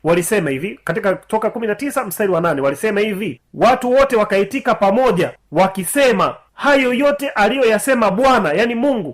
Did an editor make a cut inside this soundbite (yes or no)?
no